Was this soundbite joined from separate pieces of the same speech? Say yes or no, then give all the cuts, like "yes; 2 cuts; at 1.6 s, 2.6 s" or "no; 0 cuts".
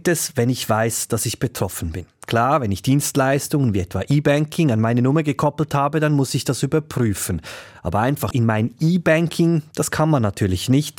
yes; 1 cut; at 8.3 s